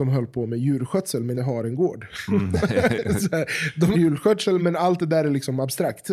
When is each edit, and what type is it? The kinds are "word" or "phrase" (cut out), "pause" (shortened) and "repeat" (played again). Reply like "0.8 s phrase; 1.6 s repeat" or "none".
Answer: 1.3 s word; 3.9 s word; 4.6 s word